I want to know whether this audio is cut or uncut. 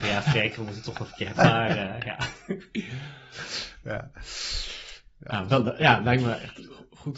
cut